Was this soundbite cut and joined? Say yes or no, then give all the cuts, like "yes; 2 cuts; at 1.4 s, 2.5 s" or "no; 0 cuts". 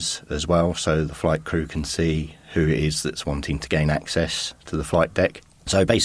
no; 0 cuts